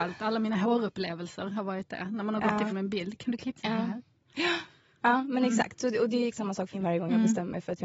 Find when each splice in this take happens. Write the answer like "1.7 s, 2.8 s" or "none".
2.7 s, 3.6 s, 6.3 s, 6.7 s